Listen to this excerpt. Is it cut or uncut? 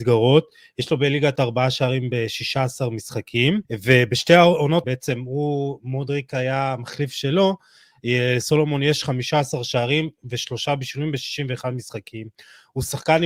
cut